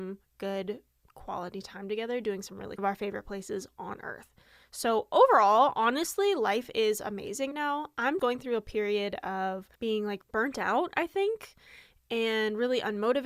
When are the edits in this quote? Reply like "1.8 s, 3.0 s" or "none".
2.8 s, 7.5 s, 8.2 s, 9.8 s, 10.2 s